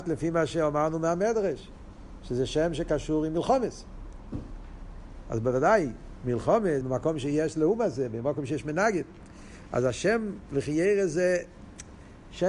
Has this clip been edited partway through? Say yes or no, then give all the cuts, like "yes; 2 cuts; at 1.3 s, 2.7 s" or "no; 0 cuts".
yes; 1 cut; at 6.8 s